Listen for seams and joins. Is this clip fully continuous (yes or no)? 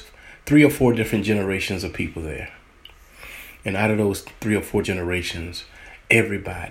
no